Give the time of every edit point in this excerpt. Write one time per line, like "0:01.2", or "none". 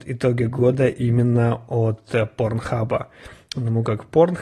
none

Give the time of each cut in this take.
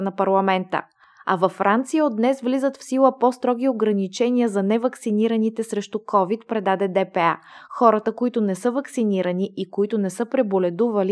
none

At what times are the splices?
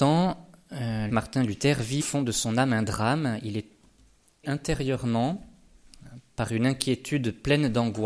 0:01.1
0:02.0
0:04.4

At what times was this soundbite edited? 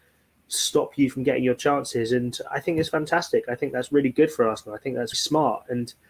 0:05.1

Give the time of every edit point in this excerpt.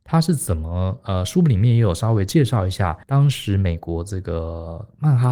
0:03.0

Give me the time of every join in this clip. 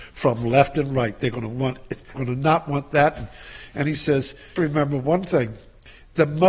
0:02.1
0:04.6

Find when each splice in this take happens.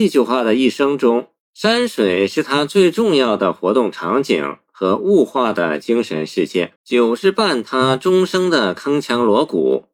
0:01.4
0:06.8

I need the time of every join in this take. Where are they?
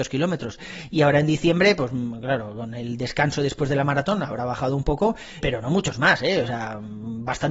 0:05.4

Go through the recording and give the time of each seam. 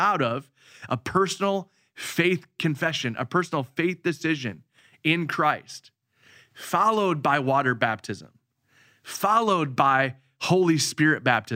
none

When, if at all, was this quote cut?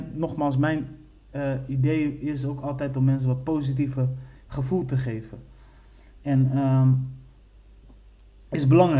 0:04.4

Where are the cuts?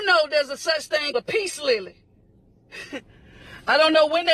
0:01.1

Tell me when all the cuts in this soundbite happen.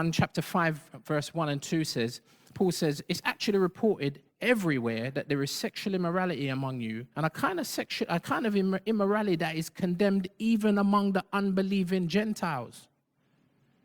0:07.1

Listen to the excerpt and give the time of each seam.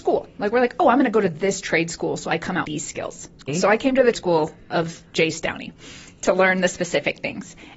0:02.6
0:03.5
0:04.1

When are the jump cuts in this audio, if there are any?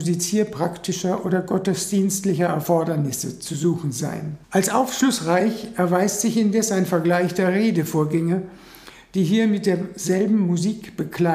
0:04.4

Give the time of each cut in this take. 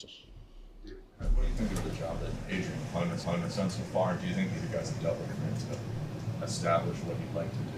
0:01.1
0:03.2
0:04.6
0:05.3

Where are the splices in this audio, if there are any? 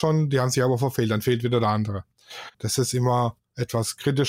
0:02.5

